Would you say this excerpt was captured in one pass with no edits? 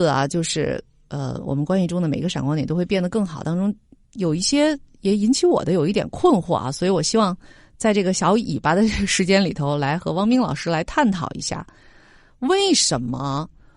yes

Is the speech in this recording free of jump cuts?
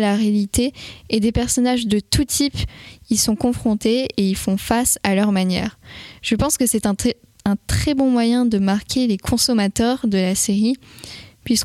yes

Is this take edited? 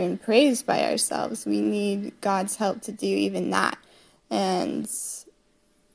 no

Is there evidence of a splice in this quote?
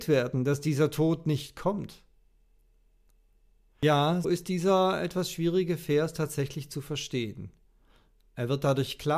yes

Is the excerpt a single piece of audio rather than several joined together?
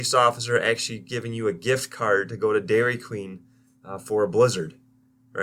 yes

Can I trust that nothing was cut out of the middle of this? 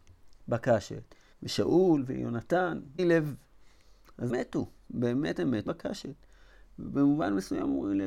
no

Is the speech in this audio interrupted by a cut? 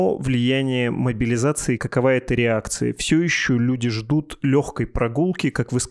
yes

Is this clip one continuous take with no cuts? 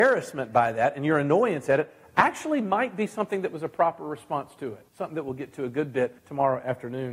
no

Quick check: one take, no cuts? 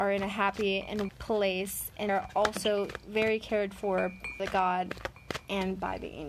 no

